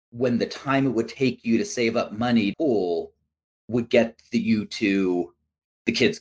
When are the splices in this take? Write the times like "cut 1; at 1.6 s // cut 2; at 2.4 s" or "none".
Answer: cut 1; at 2.5 s